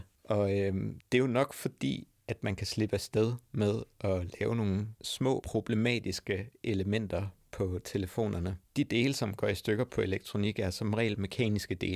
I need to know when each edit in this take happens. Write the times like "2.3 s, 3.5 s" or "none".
2.1 s